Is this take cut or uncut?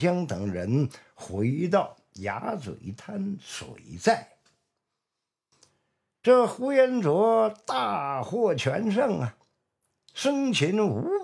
uncut